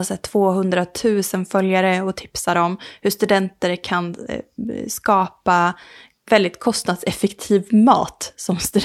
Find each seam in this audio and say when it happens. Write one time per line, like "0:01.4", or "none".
none